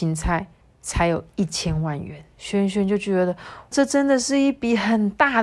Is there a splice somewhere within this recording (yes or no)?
yes